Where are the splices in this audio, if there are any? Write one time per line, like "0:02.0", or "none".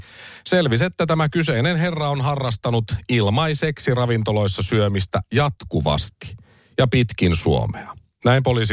none